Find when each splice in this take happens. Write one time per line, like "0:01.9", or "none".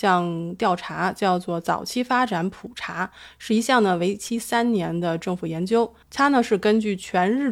0:06.0